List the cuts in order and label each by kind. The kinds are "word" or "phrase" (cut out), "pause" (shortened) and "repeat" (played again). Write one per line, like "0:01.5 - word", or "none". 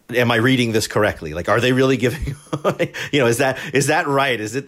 none